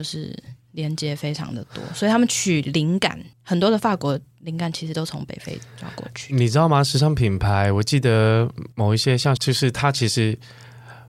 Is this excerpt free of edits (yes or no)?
no